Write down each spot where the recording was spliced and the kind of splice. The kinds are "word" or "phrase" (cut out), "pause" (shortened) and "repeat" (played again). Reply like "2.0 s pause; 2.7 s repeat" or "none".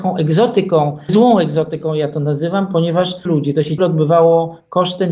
1.1 s word; 3.3 s phrase; 3.8 s word